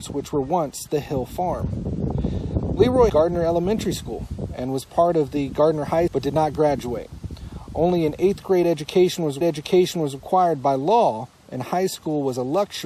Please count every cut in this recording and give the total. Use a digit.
3